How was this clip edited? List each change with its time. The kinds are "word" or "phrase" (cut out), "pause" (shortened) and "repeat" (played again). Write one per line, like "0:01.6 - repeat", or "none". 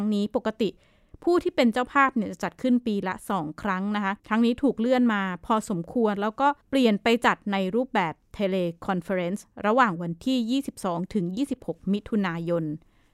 0:04.2 - pause
0:06.6 - pause